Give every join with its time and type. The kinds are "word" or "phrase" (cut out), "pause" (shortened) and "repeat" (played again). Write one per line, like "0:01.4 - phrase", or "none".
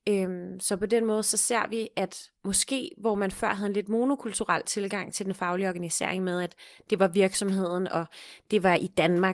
0:02.4 - pause